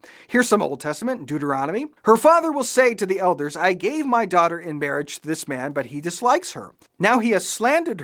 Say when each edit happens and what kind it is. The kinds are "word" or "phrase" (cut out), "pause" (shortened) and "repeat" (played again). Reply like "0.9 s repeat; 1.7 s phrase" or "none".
2.0 s pause